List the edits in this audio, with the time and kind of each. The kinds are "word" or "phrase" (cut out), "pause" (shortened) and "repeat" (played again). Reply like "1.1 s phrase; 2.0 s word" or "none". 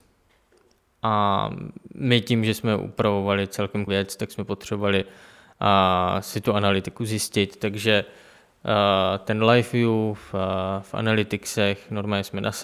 3.9 s word

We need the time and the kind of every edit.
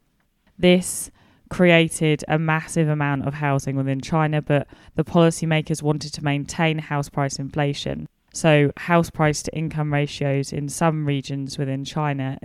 none

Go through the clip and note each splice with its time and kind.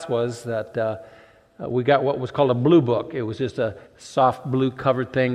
3.9 s pause

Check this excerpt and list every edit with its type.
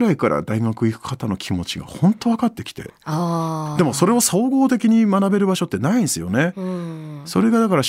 none

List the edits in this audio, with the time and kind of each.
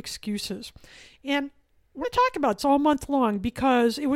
2.0 s word; 2.6 s word

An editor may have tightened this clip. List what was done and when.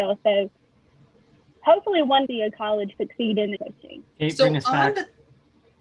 2.3 s phrase; 2.9 s word; 3.6 s word; 4.1 s pause

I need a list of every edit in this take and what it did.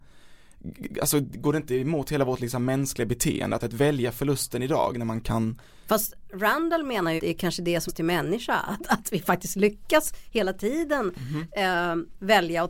3.6 s phrase; 7.2 s word; 7.9 s word

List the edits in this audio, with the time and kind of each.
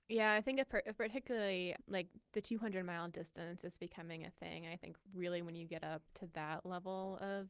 2.2 s pause; 5.0 s pause; 6.1 s pause

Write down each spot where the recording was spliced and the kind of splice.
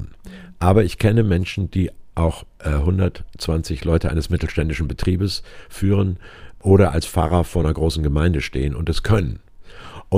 none

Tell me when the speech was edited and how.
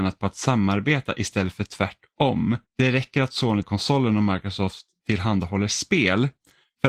2.7 s pause; 3.6 s word

